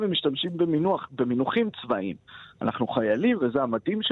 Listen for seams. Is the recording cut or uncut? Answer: uncut